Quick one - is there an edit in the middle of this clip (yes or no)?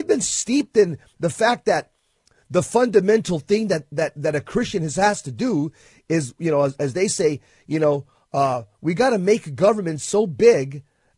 no